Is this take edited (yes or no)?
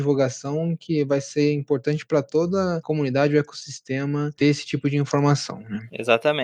no